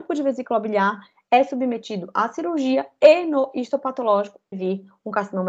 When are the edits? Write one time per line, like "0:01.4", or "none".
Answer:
0:04.5